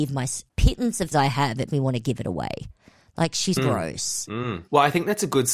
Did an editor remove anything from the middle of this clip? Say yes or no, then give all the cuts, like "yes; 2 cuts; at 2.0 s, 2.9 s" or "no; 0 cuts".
yes; 3 cuts; at 1.1 s, 1.7 s, 3.6 s